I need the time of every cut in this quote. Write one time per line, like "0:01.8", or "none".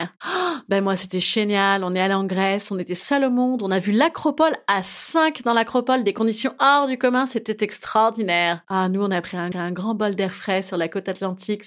0:09.5